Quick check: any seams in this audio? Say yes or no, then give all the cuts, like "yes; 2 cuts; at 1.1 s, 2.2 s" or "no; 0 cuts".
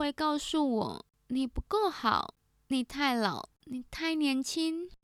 no; 0 cuts